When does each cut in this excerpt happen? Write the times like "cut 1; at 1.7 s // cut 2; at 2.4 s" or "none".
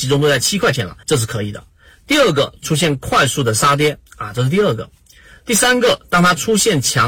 cut 1; at 1.0 s